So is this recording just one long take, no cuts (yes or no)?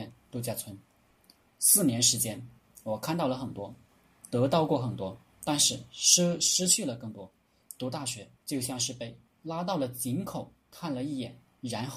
no